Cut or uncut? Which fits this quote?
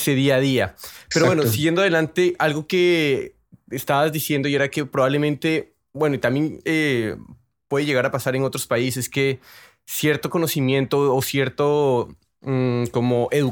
uncut